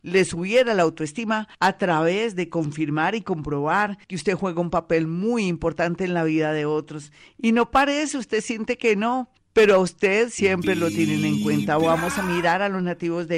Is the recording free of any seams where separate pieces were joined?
no; 3 cuts; at 1.5 s, 4.0 s, 9.4 s

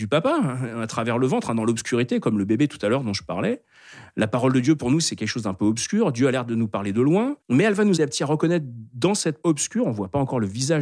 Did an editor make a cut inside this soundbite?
yes; 3 cuts; at 7.4 s, 8.0 s, 9.4 s

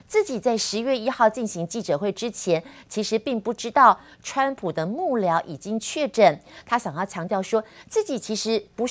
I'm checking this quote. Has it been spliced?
no; 0 cuts

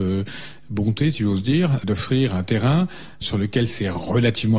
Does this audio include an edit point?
yes; 2 cuts; at 1.8 s, 3.2 s

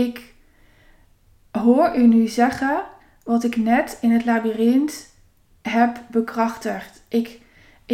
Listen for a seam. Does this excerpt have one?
no; 0 cuts

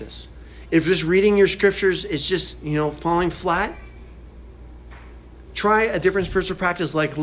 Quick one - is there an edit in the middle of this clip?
no; 0 cuts

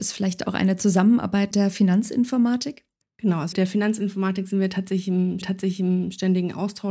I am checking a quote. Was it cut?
yes; 4 cuts; at 1.5 s, 3.0 s, 3.5 s, 5.4 s

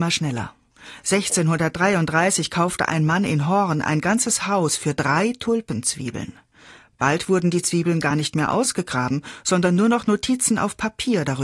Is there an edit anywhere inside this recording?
no; 0 cuts

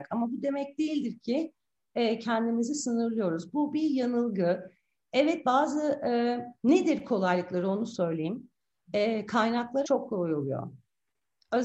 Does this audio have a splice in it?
yes; 2 cuts; at 6.5 s, 9.8 s

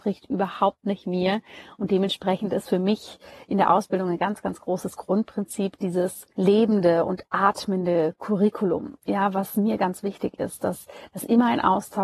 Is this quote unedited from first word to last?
no; 1 cut; at 6.3 s

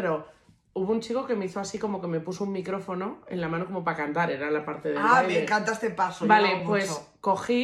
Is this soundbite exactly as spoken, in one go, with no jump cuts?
yes; 0 cuts

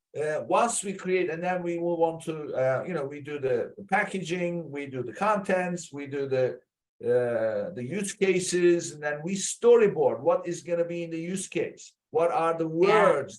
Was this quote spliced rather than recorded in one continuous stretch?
no; 0 cuts

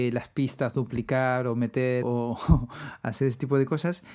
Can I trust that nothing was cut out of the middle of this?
no; 1 cut; at 2.0 s

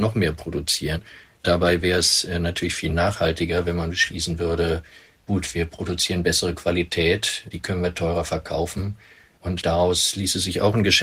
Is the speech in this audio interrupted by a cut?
no; 0 cuts

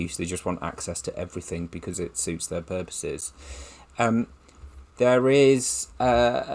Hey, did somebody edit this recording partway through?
no; 0 cuts

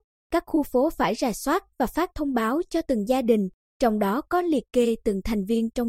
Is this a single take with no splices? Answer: yes; 0 cuts

